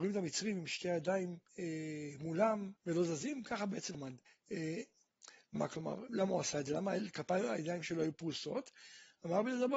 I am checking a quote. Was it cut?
yes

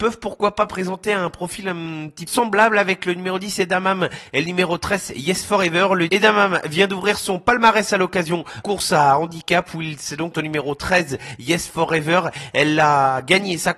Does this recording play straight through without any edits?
no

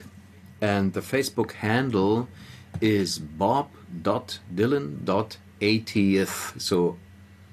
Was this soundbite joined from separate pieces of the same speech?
no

